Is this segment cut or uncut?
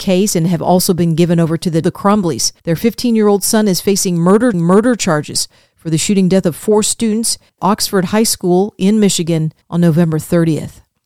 cut